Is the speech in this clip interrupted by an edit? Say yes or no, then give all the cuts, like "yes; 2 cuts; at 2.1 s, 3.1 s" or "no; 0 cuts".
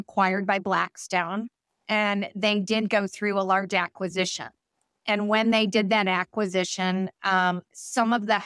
no; 0 cuts